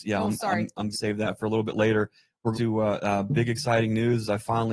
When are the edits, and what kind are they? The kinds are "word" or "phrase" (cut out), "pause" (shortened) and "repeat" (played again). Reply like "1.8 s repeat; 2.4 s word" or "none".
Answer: 0.9 s word; 2.5 s word